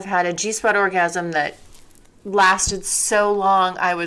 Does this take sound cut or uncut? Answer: uncut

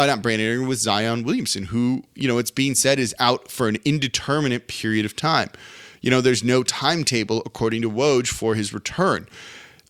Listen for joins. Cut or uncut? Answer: uncut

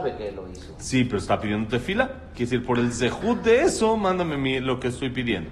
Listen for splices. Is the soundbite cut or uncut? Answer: uncut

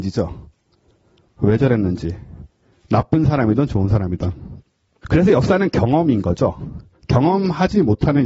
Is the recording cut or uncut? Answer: uncut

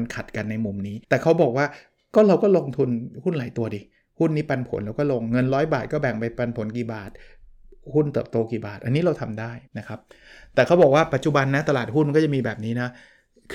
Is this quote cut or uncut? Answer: cut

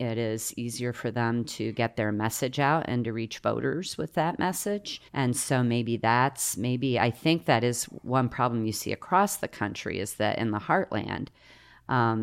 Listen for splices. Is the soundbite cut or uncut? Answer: cut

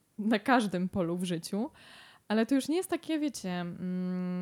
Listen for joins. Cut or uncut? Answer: uncut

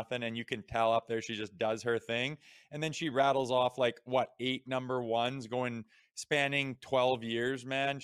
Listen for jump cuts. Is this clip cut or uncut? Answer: uncut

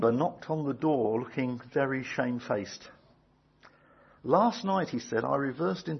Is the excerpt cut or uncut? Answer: uncut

